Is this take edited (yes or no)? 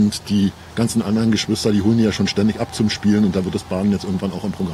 no